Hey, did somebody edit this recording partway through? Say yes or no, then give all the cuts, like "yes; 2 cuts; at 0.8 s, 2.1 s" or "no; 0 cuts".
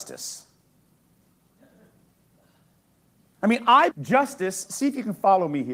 yes; 2 cuts; at 3.9 s, 4.7 s